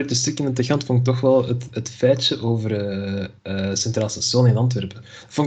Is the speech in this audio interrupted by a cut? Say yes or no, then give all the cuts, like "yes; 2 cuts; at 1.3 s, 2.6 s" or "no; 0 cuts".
yes; 1 cut; at 3.4 s